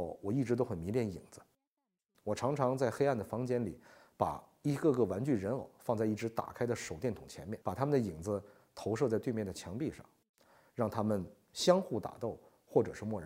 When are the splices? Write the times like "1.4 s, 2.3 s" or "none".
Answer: 7.6 s

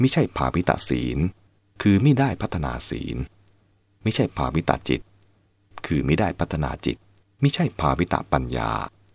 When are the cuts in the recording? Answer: 7.2 s

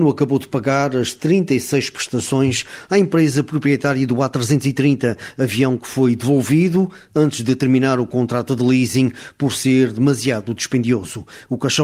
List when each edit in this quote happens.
none

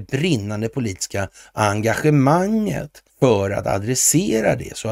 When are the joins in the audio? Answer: 3.1 s

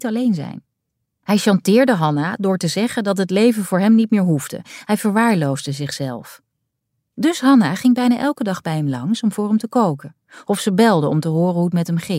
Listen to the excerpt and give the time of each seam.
none

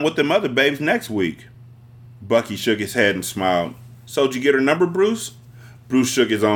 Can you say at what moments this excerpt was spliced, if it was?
none

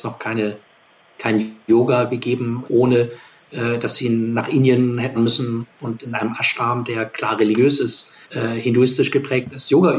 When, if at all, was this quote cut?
1.6 s, 2.7 s, 5.2 s, 8.2 s

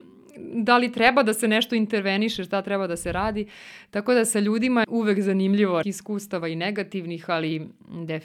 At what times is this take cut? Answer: 4.8 s, 5.8 s

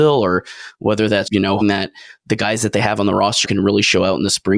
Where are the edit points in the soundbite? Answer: 1.3 s, 1.6 s, 3.4 s

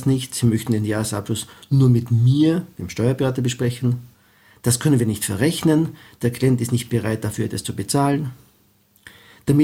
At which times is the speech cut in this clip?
none

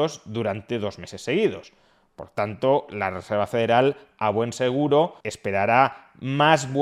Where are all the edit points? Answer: 5.2 s

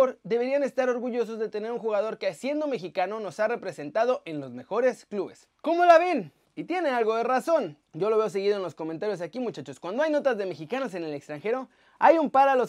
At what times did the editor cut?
6.4 s, 7.9 s

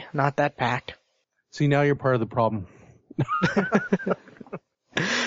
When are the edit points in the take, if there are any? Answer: none

